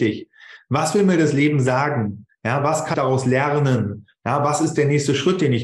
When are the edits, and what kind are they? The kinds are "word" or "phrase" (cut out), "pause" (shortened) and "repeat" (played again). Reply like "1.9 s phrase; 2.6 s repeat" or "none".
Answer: 2.9 s word